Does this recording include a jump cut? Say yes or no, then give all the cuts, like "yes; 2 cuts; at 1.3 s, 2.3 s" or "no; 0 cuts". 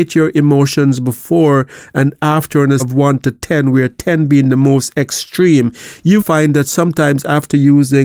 yes; 2 cuts; at 2.8 s, 6.2 s